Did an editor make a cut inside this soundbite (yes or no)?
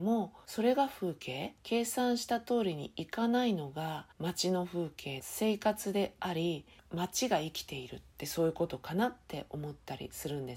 yes